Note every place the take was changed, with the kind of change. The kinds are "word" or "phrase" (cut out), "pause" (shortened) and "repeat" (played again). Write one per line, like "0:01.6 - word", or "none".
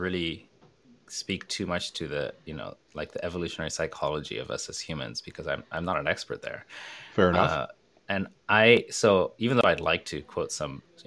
none